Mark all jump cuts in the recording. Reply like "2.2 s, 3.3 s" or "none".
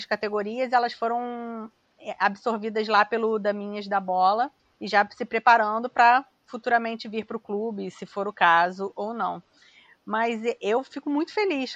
4.6 s